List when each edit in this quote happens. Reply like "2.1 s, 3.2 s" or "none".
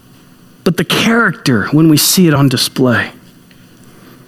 none